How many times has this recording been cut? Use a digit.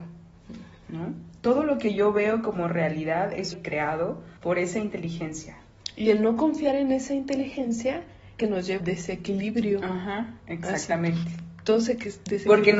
4